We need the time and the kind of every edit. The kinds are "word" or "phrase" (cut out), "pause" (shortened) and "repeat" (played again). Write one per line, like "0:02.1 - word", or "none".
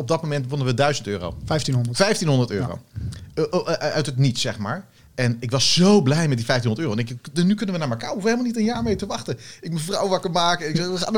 0:05.0 - pause